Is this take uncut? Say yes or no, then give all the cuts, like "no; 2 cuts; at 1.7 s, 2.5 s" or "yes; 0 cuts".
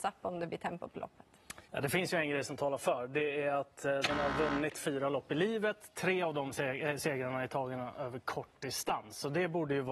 no; 1 cut; at 1.6 s